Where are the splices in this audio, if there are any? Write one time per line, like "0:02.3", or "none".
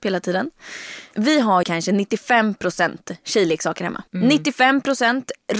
0:01.6
0:04.1